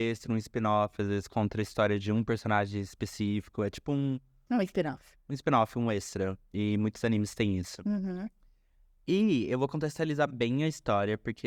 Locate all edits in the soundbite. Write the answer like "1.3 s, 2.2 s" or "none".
none